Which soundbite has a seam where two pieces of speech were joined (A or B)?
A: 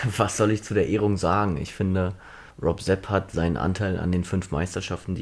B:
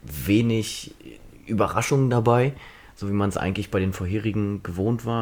A